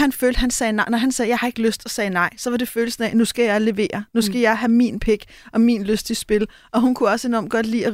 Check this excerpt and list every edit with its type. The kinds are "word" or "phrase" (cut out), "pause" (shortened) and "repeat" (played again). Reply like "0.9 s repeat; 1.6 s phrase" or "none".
none

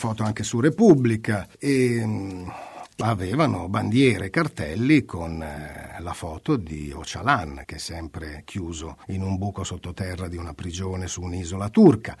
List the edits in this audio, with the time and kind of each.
1.5 s pause; 3.0 s phrase; 7.6 s word; 9.0 s pause

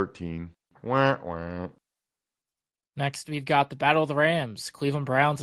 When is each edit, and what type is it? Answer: none

